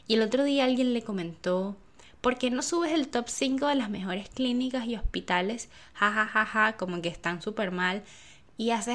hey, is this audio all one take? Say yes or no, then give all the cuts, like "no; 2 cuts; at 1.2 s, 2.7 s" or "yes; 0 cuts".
yes; 0 cuts